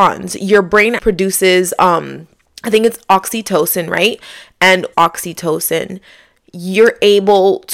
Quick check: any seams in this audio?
yes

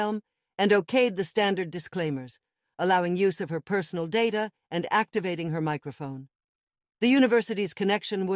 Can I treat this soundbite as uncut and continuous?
yes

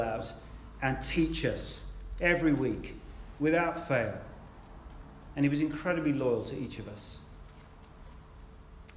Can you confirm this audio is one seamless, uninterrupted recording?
yes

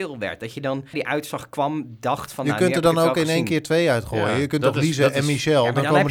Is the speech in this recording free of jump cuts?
no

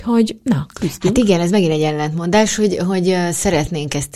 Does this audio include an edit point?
no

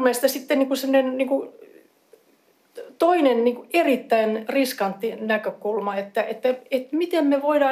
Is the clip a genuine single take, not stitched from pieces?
yes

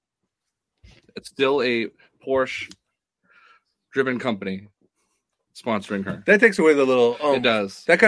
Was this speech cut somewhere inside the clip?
no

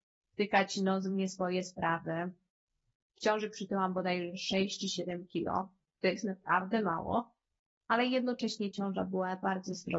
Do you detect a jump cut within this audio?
no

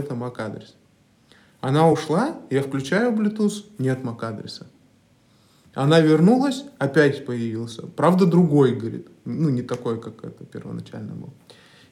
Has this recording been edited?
no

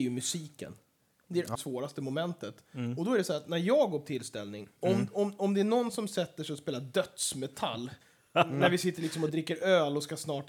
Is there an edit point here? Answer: yes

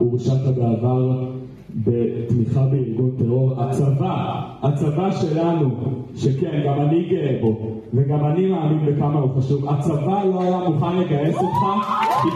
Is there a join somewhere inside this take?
no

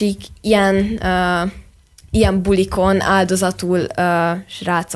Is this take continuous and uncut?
yes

